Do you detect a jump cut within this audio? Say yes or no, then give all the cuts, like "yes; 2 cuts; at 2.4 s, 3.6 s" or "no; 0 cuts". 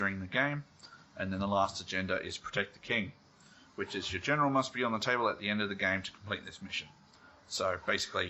no; 0 cuts